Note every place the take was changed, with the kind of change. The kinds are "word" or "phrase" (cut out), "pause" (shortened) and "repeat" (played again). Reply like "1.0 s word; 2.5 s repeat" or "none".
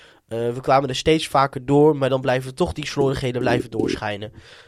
none